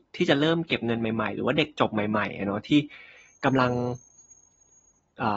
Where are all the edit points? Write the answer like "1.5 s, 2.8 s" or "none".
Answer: none